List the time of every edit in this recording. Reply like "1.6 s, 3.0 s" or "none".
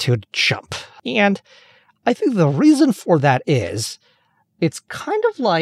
none